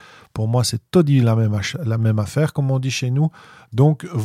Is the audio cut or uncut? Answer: uncut